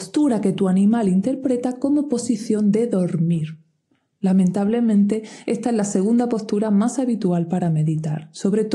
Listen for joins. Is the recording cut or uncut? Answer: uncut